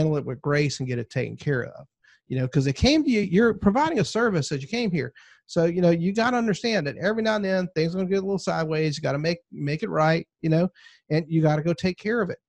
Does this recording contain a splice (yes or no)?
no